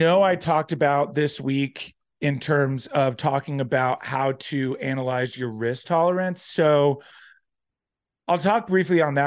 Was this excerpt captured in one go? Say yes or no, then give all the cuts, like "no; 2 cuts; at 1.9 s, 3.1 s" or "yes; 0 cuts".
yes; 0 cuts